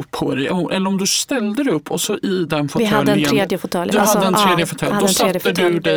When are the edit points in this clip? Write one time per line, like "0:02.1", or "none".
none